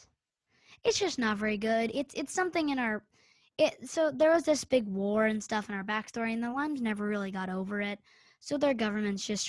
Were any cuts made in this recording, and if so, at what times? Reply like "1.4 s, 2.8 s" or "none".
none